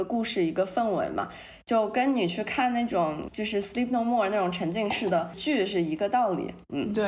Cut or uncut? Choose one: uncut